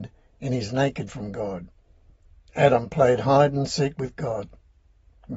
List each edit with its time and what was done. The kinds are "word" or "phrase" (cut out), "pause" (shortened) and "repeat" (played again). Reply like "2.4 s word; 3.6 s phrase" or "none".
1.1 s word